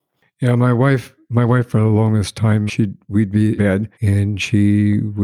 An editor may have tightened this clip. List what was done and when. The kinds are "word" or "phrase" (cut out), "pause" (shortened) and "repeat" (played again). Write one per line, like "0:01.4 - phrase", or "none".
0:02.7 - word
0:03.6 - word
0:03.9 - pause